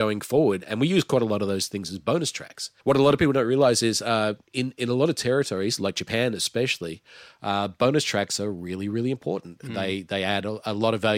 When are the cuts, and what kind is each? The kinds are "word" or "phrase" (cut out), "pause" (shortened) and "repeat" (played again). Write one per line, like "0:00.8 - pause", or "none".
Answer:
0:02.8 - pause
0:04.5 - pause